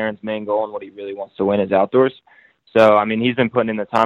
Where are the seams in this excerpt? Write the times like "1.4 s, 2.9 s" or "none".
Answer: none